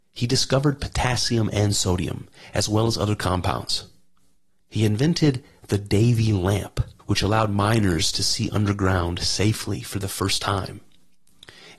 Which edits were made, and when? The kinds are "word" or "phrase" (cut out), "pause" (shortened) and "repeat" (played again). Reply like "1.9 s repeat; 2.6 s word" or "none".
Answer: 7.0 s pause